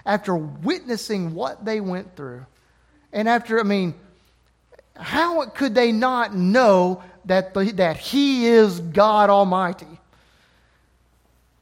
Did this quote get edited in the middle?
no; 0 cuts

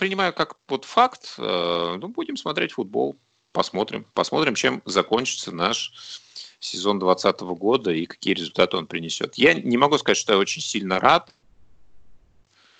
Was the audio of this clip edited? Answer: no; 0 cuts

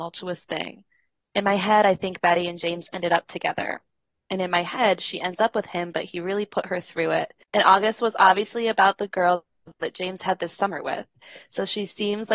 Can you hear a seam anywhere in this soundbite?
no; 0 cuts

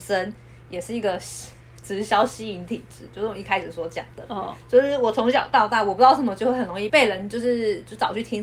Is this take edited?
no; 0 cuts

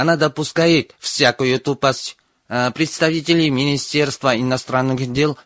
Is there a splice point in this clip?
no; 0 cuts

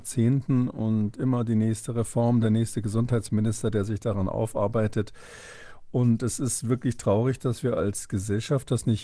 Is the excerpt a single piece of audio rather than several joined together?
yes; 0 cuts

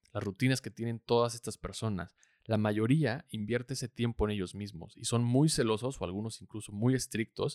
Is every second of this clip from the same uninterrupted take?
yes; 0 cuts

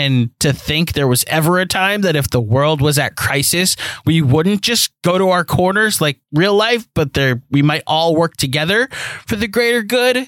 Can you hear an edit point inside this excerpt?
yes; 1 cut; at 6.2 s

